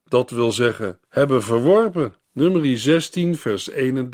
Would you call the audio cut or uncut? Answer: cut